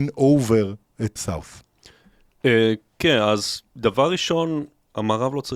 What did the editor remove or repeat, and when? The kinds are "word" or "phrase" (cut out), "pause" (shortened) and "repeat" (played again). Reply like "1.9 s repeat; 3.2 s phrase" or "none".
1.2 s word; 3.7 s pause